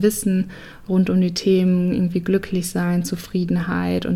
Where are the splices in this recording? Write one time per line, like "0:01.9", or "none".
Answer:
none